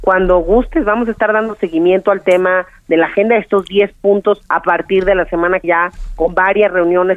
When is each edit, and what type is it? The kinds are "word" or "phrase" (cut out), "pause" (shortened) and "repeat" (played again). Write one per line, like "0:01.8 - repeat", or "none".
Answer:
0:04.5 - pause
0:05.6 - word